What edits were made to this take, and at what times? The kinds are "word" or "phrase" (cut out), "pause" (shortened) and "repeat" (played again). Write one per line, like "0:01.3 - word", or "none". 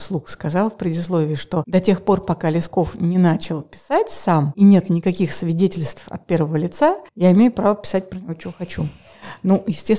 0:07.1 - pause

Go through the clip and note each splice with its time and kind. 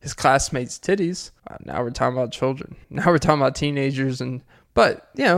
0:01.4 - pause
0:02.8 - pause

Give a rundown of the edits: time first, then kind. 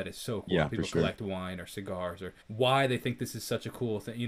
0:02.4 - pause

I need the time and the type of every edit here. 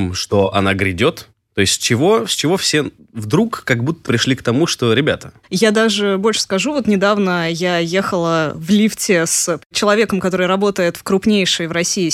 0:04.1 - word
0:05.4 - pause

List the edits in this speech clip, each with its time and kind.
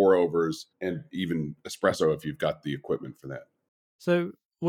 none

